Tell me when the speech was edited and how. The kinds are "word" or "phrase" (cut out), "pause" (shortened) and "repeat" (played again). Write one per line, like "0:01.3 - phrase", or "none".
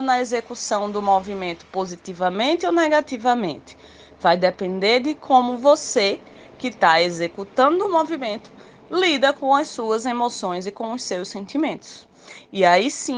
none